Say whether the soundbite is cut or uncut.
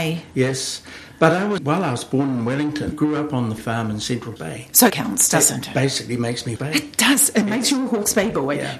cut